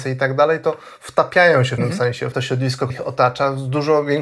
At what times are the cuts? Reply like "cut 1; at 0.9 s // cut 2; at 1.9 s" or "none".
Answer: cut 1; at 1.8 s // cut 2; at 2.3 s // cut 3; at 2.9 s